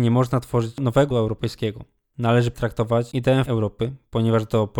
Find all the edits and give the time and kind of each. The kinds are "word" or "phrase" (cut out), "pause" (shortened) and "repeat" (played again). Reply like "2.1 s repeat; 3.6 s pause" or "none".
1.1 s word; 2.5 s word; 3.4 s word